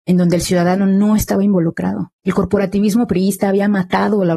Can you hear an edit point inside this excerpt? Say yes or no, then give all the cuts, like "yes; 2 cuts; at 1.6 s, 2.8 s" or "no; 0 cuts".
yes; 1 cut; at 2.2 s